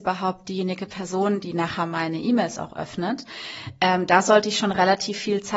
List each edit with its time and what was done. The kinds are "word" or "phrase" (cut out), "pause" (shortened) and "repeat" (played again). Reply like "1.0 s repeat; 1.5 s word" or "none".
none